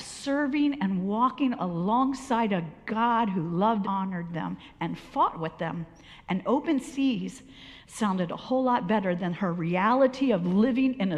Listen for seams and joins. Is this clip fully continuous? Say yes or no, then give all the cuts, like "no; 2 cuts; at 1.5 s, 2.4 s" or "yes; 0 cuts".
no; 1 cut; at 3.8 s